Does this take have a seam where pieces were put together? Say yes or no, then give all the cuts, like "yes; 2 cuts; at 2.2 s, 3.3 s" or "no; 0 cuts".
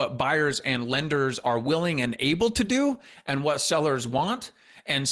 no; 0 cuts